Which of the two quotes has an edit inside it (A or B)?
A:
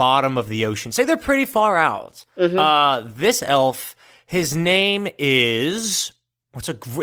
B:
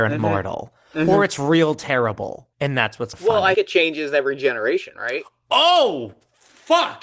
B